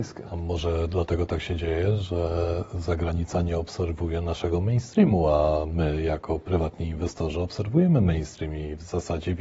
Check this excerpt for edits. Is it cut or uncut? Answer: uncut